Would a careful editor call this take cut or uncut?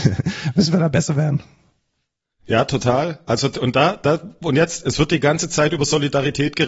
uncut